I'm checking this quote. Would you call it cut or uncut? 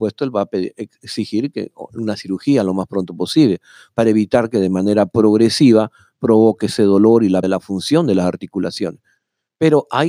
cut